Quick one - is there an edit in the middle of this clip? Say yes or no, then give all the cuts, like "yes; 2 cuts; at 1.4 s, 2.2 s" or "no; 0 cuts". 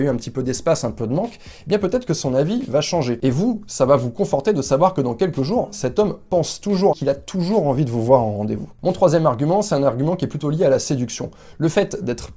yes; 1 cut; at 6.9 s